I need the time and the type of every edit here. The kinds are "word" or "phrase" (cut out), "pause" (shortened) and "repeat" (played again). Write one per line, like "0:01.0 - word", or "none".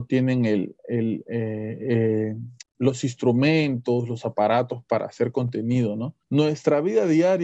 0:02.6 - pause
0:06.2 - pause